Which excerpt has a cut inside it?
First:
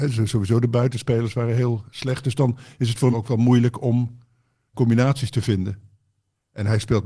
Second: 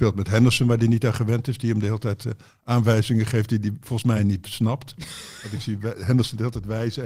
first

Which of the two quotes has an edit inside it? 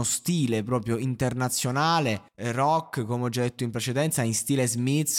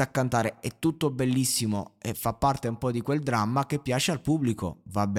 first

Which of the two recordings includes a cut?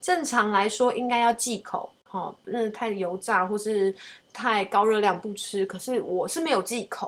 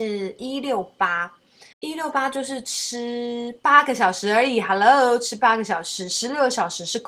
second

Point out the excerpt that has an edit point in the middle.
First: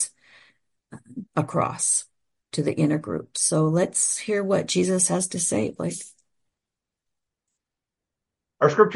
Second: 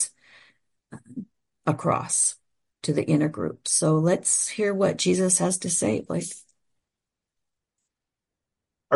first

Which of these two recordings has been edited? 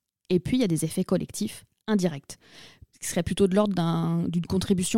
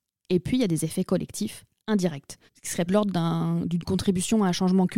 second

